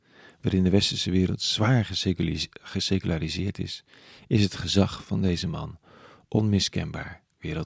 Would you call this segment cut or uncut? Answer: uncut